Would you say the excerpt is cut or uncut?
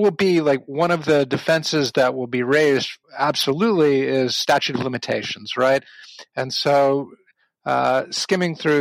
cut